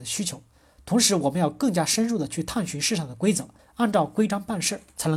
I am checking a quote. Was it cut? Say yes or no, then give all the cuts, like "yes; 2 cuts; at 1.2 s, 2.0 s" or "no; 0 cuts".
yes; 1 cut; at 3.6 s